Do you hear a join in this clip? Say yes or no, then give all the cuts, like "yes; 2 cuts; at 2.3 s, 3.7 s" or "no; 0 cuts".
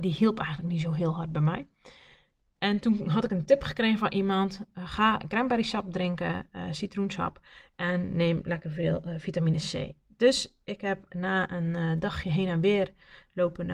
no; 0 cuts